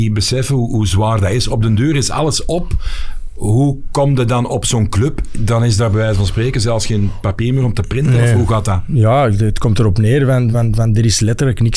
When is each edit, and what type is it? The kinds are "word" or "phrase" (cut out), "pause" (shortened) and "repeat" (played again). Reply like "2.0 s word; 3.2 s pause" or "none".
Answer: none